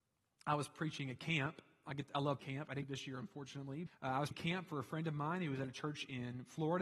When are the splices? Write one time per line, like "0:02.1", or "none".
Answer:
0:02.4
0:02.8
0:03.9
0:04.3